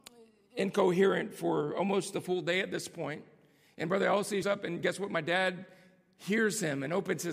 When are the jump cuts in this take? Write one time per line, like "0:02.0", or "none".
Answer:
0:04.4